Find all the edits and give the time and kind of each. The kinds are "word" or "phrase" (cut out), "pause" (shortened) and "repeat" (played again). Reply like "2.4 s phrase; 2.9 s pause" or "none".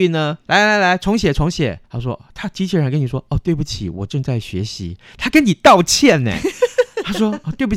1.8 s pause